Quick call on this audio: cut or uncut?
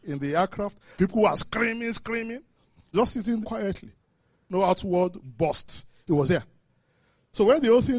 cut